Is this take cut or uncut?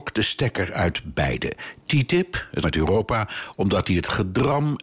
cut